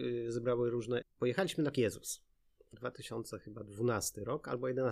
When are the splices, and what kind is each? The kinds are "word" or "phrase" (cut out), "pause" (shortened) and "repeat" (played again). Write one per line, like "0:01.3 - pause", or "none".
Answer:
0:01.0 - word
0:01.7 - word
0:02.7 - word